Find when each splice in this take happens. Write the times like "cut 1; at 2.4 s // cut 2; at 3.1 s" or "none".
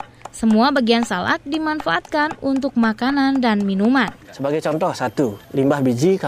cut 1; at 4.2 s